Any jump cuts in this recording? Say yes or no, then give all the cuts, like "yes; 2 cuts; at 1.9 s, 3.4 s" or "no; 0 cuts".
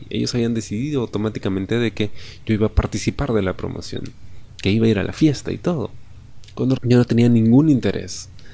yes; 1 cut; at 6.8 s